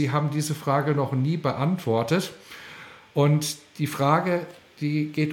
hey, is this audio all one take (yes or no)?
yes